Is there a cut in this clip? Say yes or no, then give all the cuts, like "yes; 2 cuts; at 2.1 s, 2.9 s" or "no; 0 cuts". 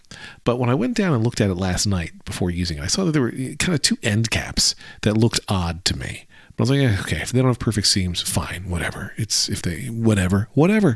no; 0 cuts